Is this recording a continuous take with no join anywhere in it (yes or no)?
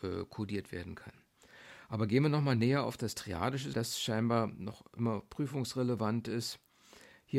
no